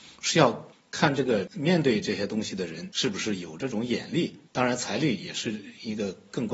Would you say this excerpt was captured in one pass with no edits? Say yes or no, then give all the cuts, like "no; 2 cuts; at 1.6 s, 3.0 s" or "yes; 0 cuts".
no; 1 cut; at 4.5 s